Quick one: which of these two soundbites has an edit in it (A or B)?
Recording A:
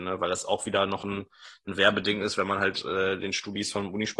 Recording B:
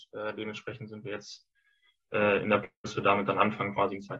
B